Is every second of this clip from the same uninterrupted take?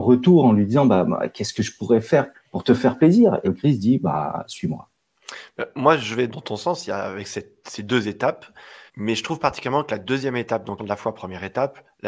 no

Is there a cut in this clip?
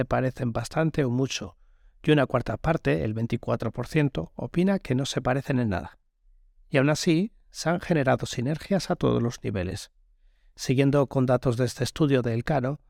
no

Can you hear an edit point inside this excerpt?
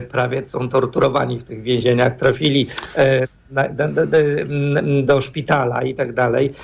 no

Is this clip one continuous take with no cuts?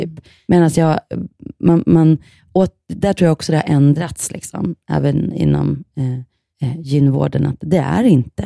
yes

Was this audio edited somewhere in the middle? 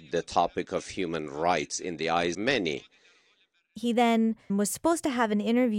yes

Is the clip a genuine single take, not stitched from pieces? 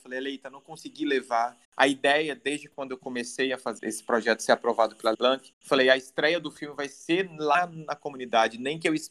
no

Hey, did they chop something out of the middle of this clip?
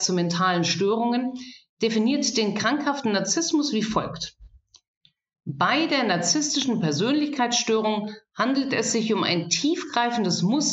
no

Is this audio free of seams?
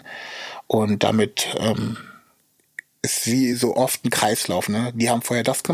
yes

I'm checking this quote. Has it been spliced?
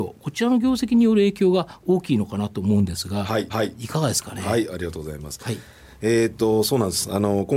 yes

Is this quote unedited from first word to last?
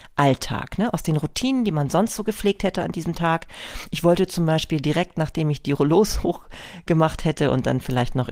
yes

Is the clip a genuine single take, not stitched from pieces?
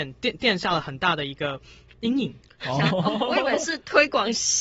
no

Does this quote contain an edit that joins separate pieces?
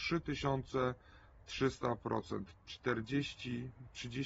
yes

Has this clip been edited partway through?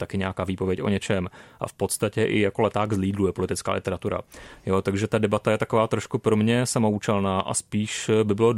no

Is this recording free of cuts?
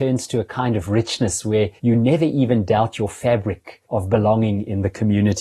no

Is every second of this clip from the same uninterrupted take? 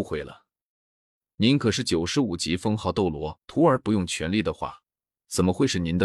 no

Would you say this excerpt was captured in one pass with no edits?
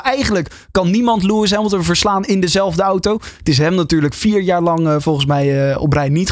yes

